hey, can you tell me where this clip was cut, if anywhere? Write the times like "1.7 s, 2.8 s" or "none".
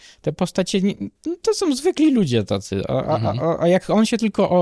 1.2 s